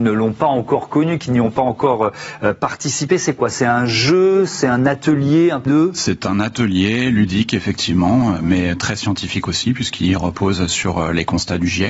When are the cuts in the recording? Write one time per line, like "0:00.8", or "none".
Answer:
0:05.7